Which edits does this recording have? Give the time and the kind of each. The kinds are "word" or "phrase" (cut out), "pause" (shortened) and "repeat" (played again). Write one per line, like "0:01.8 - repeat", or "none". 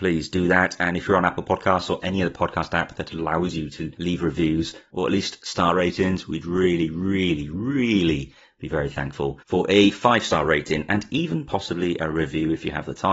0:09.4 - pause